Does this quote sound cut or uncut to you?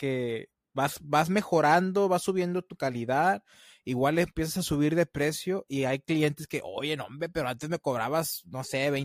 uncut